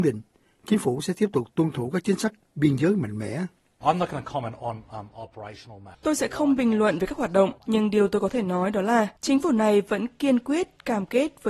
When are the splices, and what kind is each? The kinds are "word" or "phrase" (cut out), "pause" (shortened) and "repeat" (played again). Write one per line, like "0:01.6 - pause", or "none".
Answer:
0:05.9 - pause
0:07.6 - pause
0:09.2 - pause